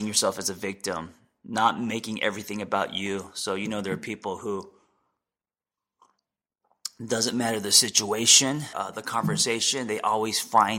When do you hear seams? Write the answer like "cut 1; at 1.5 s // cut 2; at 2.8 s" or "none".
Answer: cut 1; at 8.7 s